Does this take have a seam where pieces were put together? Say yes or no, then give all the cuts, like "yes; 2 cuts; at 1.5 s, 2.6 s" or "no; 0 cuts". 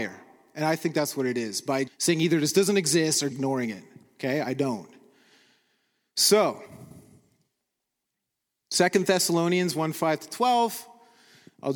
yes; 2 cuts; at 1.9 s, 3.3 s